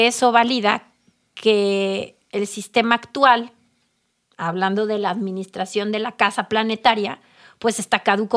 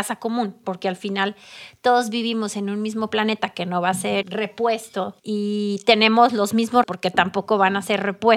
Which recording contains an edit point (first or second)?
second